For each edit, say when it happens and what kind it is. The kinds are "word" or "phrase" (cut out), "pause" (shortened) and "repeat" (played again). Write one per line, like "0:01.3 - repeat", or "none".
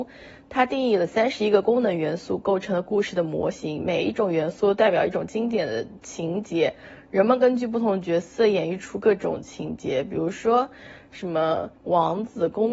0:11.8 - pause

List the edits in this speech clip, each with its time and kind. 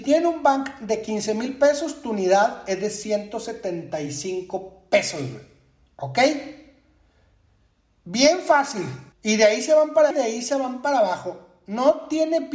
0:09.1 - pause
0:10.1 - word

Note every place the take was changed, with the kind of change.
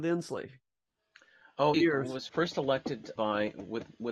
0:01.7 - word
0:02.3 - word
0:03.2 - word

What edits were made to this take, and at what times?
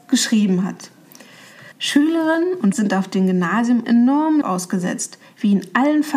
0:01.7 - pause
0:02.7 - word
0:03.8 - word
0:04.4 - word

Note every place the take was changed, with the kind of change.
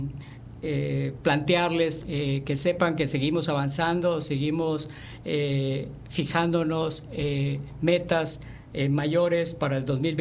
0:02.0 - word

